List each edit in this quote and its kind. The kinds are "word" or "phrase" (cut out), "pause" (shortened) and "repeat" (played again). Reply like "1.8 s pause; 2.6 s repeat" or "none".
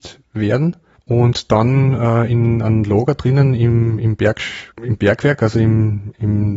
1.0 s pause; 4.7 s pause